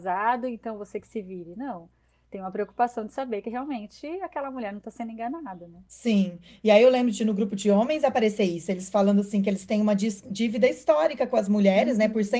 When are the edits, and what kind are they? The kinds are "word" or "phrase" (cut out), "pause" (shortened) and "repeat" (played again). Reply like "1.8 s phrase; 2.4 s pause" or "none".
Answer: none